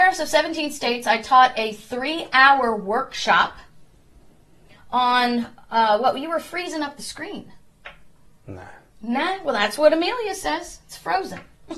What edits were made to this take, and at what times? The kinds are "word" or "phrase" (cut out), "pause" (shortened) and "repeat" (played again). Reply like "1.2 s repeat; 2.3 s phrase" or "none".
none